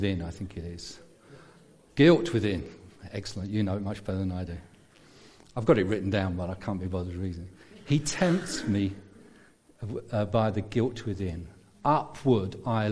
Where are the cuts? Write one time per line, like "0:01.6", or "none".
none